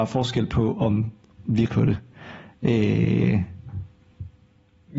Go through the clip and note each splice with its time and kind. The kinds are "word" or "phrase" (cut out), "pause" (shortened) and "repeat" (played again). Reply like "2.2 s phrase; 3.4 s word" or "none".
1.7 s word